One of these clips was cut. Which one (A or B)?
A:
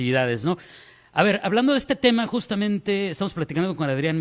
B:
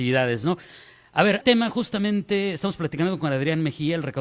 B